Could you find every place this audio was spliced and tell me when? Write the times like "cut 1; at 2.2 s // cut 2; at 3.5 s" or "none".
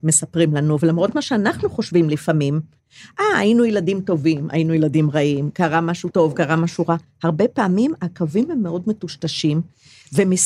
cut 1; at 6.1 s